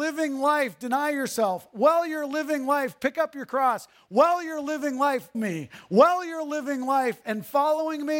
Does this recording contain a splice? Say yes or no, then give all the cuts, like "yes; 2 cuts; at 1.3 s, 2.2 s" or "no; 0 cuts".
yes; 1 cut; at 5.3 s